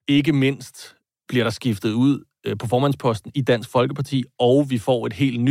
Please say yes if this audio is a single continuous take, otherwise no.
yes